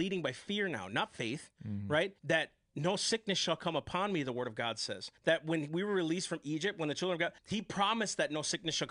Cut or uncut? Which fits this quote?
cut